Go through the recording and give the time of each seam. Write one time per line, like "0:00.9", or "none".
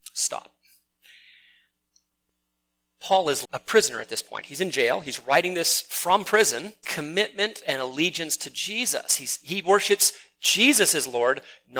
0:03.4
0:06.8